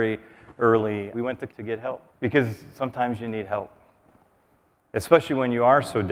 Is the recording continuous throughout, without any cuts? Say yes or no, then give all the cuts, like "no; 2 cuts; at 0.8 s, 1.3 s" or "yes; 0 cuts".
no; 3 cuts; at 1.1 s, 1.5 s, 2.1 s